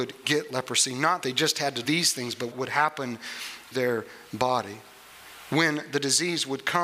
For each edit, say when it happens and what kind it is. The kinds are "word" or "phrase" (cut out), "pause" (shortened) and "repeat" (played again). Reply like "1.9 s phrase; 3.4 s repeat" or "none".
1.2 s word; 1.8 s word; 2.5 s word; 3.7 s word